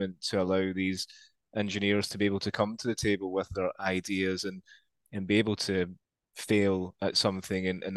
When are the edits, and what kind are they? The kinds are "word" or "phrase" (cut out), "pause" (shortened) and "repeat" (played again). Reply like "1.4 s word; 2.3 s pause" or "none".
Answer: 6.0 s pause